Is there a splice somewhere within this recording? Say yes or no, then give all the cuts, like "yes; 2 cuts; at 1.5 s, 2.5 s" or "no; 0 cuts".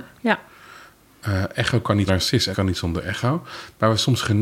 yes; 2 cuts; at 2.1 s, 2.5 s